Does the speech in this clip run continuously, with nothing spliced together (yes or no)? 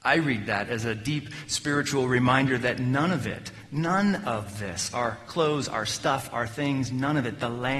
yes